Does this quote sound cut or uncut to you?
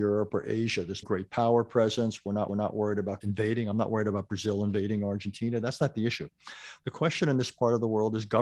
cut